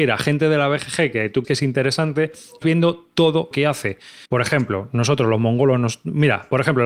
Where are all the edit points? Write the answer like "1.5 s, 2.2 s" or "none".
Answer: 1.4 s, 2.6 s, 3.5 s, 4.3 s